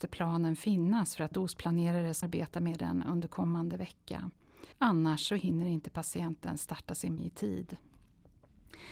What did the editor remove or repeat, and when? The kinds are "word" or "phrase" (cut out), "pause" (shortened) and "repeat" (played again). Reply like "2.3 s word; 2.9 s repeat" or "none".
1.3 s word; 2.2 s word; 4.7 s pause; 7.2 s word